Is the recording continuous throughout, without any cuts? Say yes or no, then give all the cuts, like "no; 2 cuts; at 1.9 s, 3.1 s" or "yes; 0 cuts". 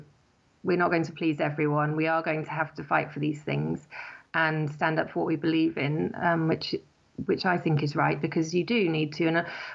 yes; 0 cuts